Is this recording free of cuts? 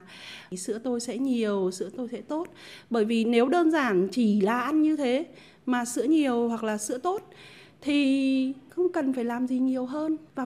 yes; 0 cuts

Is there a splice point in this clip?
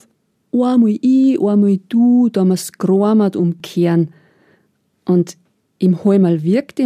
no; 0 cuts

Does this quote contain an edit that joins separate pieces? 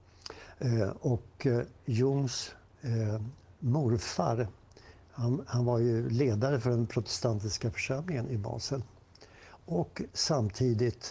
no; 0 cuts

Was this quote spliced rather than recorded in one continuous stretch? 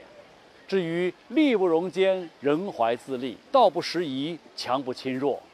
yes; 1 cut; at 3.5 s

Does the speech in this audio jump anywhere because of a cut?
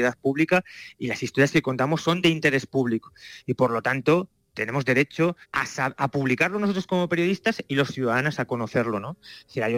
yes; 1 cut; at 5.4 s

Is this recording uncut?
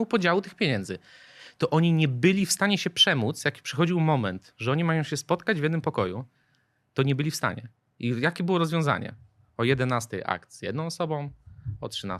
yes; 0 cuts

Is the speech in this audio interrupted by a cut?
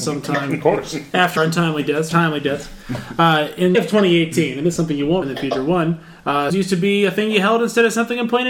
yes; 6 cuts; at 1.4 s, 2.1 s, 3.7 s, 4.8 s, 5.2 s, 6.5 s

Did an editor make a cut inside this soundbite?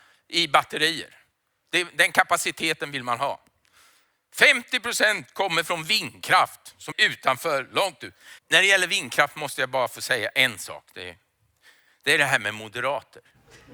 yes; 2 cuts; at 6.9 s, 8.4 s

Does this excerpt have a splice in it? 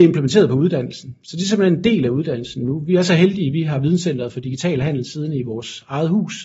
no; 0 cuts

